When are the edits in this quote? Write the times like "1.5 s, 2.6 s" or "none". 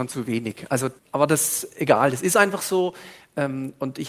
1.0 s